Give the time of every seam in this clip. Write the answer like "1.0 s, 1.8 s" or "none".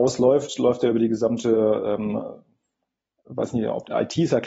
none